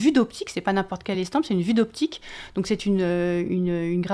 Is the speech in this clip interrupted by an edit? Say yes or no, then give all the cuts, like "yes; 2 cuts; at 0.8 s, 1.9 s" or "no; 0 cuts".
no; 0 cuts